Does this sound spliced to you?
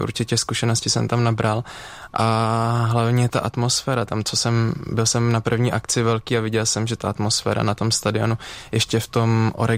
no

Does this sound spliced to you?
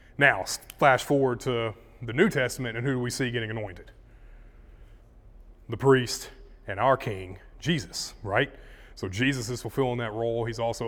no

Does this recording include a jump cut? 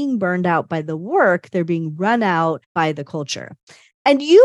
yes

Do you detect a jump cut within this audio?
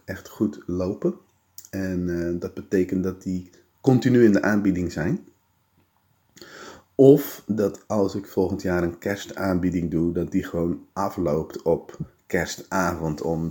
no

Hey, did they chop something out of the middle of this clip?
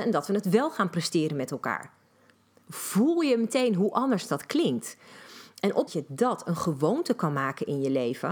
yes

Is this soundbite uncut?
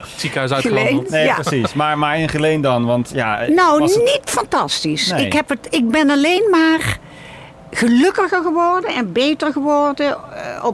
yes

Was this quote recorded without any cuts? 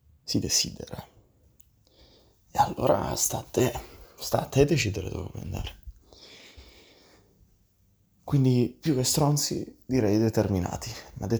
yes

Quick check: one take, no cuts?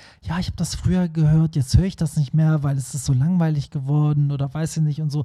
yes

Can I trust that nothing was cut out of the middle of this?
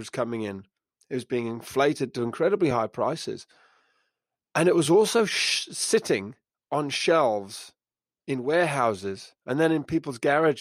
yes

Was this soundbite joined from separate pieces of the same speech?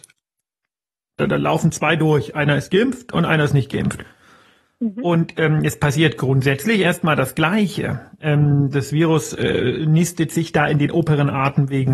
no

